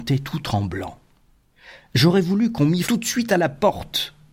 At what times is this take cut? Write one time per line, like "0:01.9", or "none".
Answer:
0:02.8